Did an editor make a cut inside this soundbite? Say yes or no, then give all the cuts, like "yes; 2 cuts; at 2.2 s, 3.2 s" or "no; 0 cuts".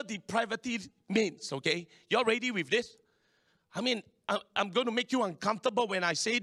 no; 0 cuts